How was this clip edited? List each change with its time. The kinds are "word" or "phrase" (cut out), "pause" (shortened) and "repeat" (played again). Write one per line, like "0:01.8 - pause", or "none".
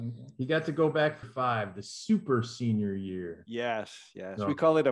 0:01.2 - word